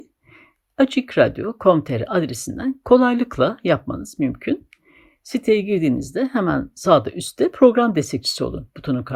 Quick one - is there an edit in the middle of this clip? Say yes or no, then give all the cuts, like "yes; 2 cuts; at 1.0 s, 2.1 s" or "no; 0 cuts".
no; 0 cuts